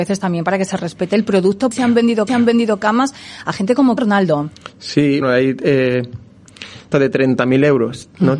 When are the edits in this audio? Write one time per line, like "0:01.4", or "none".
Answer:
0:01.7
0:02.3
0:04.0
0:05.2
0:06.9